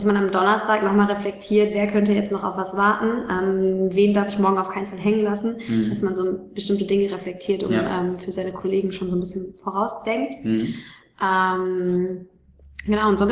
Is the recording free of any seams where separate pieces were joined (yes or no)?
yes